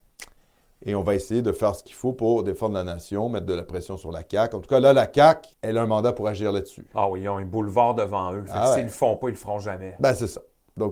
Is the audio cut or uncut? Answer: cut